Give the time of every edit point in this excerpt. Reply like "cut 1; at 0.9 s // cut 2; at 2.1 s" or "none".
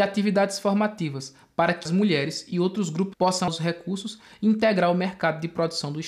cut 1; at 1.9 s // cut 2; at 3.1 s // cut 3; at 3.5 s